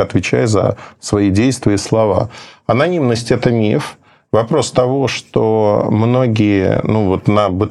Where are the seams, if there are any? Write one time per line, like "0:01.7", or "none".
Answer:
none